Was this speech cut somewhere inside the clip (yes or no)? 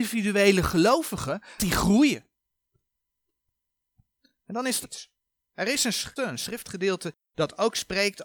yes